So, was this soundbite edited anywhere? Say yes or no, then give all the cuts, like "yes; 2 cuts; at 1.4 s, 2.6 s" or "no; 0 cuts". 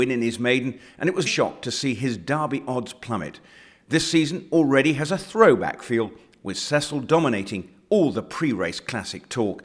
yes; 1 cut; at 1.3 s